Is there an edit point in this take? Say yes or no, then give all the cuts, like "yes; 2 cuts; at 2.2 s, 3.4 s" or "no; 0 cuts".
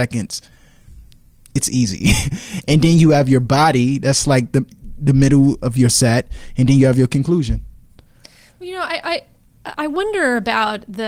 no; 0 cuts